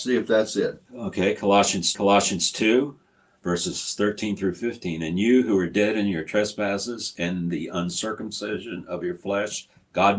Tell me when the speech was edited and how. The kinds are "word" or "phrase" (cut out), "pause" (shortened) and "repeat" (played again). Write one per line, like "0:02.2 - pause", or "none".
0:01.9 - repeat

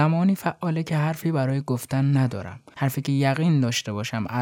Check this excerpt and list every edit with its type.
none

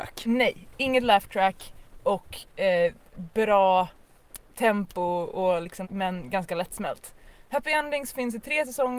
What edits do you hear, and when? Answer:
0:05.8 - phrase

